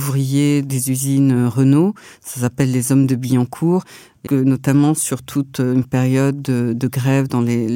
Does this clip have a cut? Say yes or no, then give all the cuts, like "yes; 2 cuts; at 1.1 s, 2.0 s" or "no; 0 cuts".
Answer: yes; 1 cut; at 4.3 s